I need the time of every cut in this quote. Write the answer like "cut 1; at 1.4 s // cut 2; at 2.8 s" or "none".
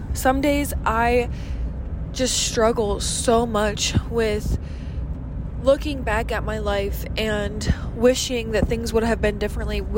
none

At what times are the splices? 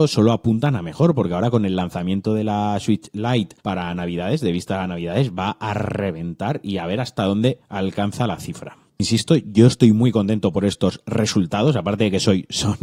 cut 1; at 3.6 s

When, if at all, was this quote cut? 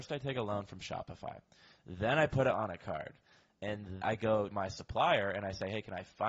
cut 1; at 2.8 s // cut 2; at 4.0 s // cut 3; at 4.5 s

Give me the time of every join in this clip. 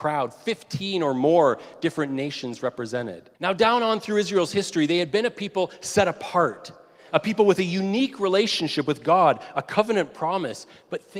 cut 1; at 3.3 s

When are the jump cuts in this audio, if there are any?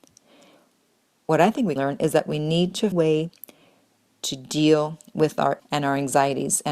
cut 1; at 1.8 s // cut 2; at 2.9 s // cut 3; at 5.6 s

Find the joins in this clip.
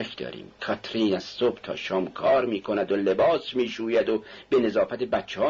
none

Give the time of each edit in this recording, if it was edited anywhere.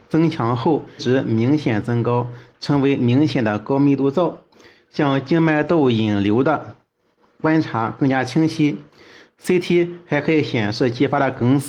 cut 1; at 1.0 s

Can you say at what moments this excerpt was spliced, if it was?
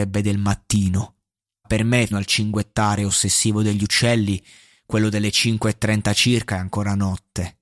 cut 1; at 1.6 s // cut 2; at 2.1 s

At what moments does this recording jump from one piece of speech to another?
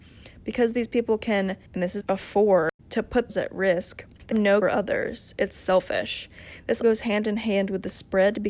cut 1; at 1.7 s // cut 2; at 2.0 s // cut 3; at 2.8 s // cut 4; at 3.3 s // cut 5; at 4.3 s // cut 6; at 4.6 s // cut 7; at 6.8 s

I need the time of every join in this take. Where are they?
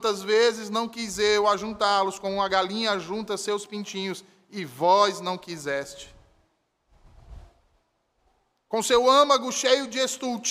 none

